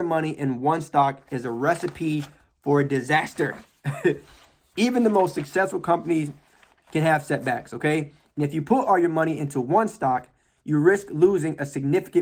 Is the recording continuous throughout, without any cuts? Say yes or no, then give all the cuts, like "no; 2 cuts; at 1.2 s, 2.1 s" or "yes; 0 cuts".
yes; 0 cuts